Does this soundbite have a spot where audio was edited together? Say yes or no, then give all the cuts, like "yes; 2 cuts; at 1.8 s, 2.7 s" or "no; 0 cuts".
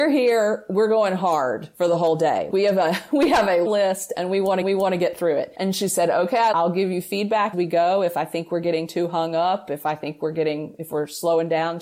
yes; 5 cuts; at 2.5 s, 3.7 s, 4.6 s, 6.5 s, 7.5 s